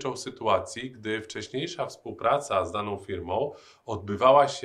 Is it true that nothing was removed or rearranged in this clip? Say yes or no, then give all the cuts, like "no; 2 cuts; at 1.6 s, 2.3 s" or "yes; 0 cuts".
yes; 0 cuts